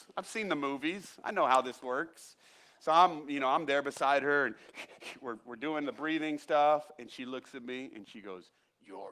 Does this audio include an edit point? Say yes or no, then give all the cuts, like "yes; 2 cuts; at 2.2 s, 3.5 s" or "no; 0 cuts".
no; 0 cuts